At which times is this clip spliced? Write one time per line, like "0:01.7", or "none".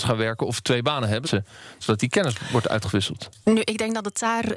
0:01.2
0:01.8